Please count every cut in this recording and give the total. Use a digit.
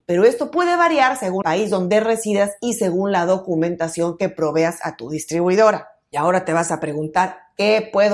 1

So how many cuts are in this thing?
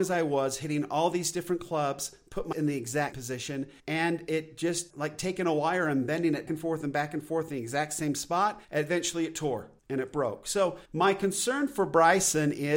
8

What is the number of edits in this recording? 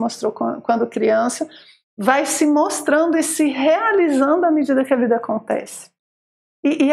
0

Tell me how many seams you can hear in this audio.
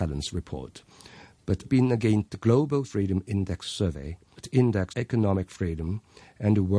5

